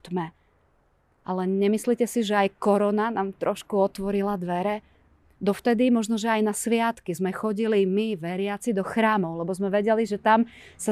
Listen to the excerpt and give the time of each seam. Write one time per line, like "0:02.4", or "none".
none

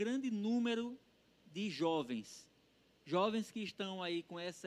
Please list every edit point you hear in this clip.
none

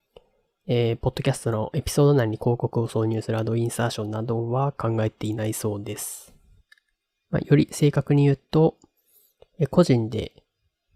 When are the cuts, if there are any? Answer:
none

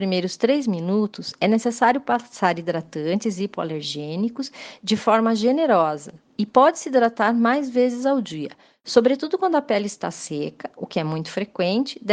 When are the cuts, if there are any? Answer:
none

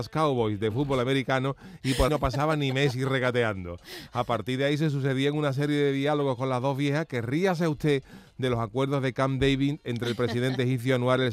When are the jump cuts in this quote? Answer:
0:02.1

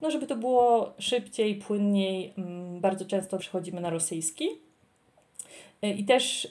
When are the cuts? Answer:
0:03.4

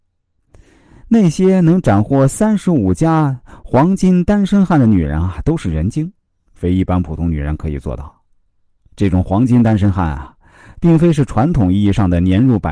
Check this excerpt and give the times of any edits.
none

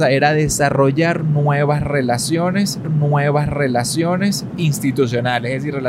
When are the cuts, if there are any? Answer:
0:02.8

